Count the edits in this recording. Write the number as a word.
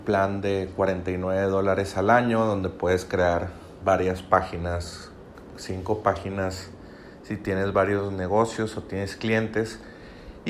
zero